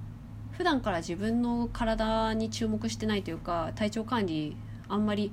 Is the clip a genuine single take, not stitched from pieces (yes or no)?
yes